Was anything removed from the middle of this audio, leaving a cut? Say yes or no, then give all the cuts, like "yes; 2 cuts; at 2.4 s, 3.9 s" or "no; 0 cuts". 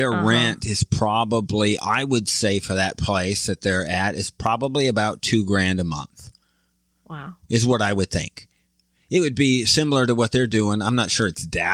no; 0 cuts